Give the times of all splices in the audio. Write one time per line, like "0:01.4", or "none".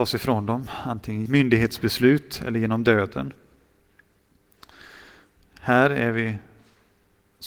0:01.3